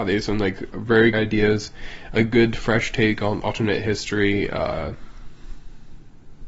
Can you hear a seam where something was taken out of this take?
yes; 2 cuts; at 1.1 s, 3.4 s

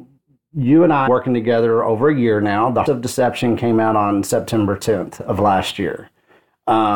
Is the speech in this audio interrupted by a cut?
yes; 2 cuts; at 1.1 s, 2.9 s

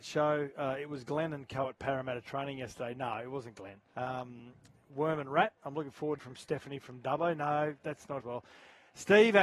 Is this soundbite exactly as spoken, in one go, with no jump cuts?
no; 4 cuts; at 3.9 s, 5.6 s, 6.2 s, 8.2 s

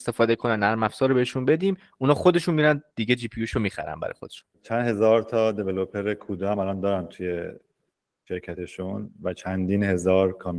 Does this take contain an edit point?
no; 0 cuts

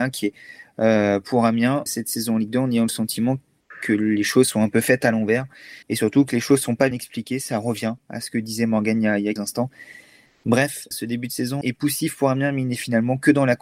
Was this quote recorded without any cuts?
no; 6 cuts; at 1.9 s, 5.8 s, 6.9 s, 9.4 s, 10.9 s, 11.6 s

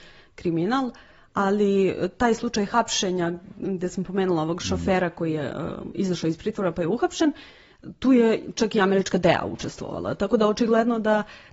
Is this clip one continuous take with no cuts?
yes; 0 cuts

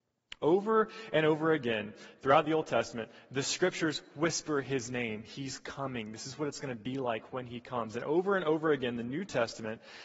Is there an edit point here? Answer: no; 0 cuts

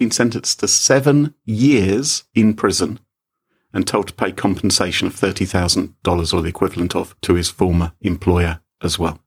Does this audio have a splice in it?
no; 0 cuts

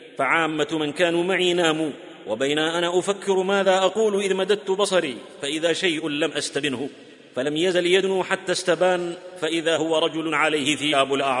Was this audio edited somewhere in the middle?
no; 0 cuts

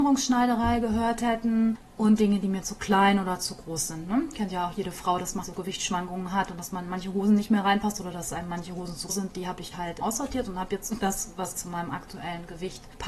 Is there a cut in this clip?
yes; 4 cuts; at 5.4 s, 9.1 s, 9.7 s, 11.0 s

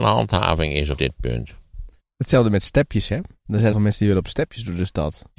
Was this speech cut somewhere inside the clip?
yes; 3 cuts; at 1.0 s, 2.0 s, 3.7 s

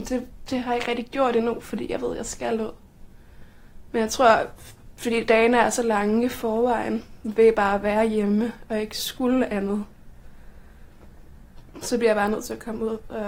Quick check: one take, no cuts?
yes; 0 cuts

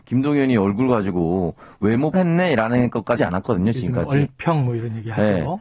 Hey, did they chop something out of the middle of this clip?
yes; 2 cuts; at 2.1 s, 3.2 s

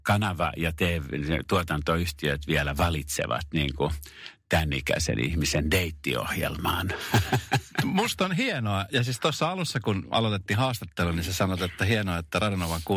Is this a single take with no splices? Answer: yes; 0 cuts

